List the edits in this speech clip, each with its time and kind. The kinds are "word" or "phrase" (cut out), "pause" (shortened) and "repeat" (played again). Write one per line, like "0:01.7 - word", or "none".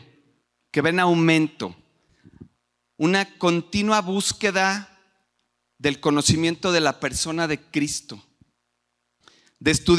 none